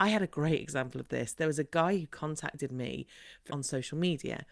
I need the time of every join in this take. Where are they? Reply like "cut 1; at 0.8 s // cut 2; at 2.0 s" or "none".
cut 1; at 3.5 s